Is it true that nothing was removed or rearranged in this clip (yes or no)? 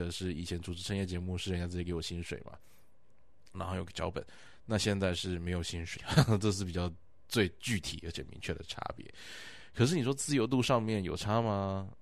no